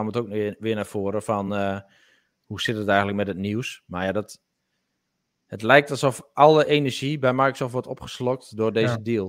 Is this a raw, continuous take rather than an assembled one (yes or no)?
yes